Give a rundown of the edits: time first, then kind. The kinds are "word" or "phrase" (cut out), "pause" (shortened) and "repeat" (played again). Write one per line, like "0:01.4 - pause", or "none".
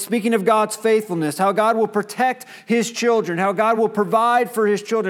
none